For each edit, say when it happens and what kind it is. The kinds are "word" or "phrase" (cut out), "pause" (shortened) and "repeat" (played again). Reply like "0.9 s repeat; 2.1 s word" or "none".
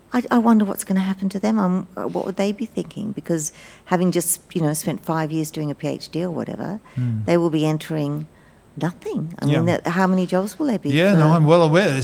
none